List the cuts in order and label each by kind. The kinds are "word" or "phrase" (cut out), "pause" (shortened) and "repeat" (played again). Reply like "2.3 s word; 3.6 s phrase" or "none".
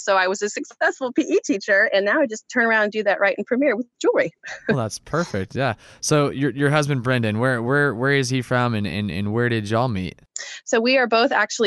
none